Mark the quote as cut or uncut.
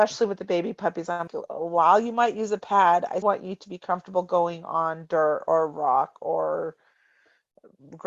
cut